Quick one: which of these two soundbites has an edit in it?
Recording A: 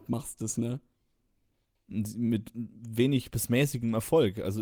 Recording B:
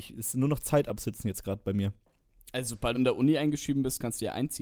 B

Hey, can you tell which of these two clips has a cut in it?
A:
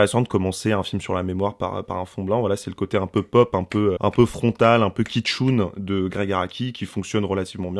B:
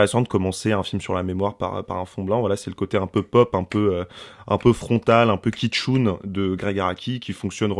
A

